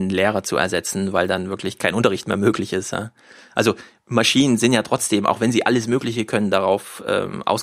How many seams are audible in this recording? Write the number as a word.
zero